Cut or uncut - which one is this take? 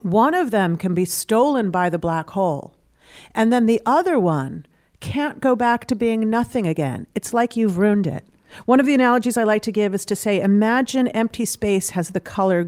uncut